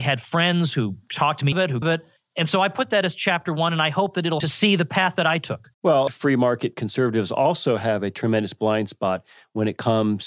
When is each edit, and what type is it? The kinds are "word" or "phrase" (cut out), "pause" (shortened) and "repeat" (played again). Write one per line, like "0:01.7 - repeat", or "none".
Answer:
0:01.5 - word
0:01.8 - phrase
0:04.4 - phrase
0:05.7 - pause
0:06.1 - phrase